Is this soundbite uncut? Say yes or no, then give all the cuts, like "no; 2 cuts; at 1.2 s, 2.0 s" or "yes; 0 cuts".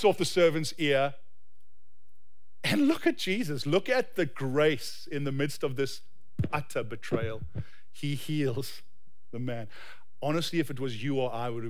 yes; 0 cuts